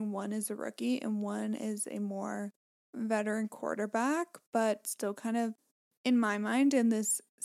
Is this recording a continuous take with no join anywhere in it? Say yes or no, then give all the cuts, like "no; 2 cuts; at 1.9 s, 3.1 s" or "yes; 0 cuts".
yes; 0 cuts